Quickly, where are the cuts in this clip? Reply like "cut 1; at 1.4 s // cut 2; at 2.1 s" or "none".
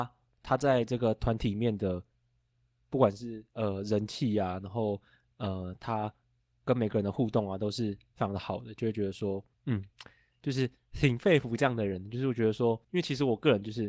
cut 1; at 9.5 s // cut 2; at 12.8 s